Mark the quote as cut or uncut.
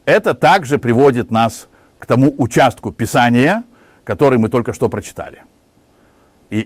uncut